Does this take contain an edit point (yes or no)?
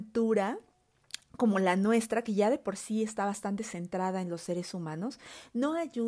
no